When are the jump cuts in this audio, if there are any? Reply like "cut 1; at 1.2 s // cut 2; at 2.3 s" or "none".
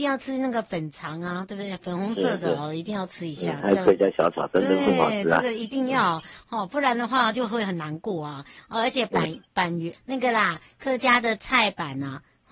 cut 1; at 9.9 s